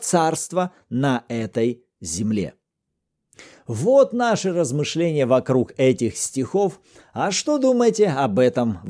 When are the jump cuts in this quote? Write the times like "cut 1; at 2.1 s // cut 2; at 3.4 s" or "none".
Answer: none

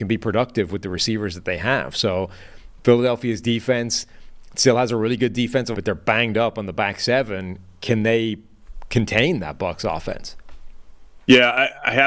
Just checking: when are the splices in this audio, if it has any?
cut 1; at 5.7 s

